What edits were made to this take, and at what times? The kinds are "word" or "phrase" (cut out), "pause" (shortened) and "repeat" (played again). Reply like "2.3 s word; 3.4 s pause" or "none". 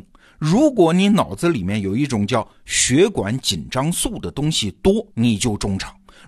5.1 s pause